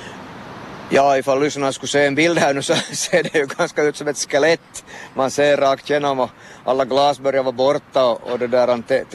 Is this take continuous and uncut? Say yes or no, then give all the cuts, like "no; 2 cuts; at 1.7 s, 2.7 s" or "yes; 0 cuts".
yes; 0 cuts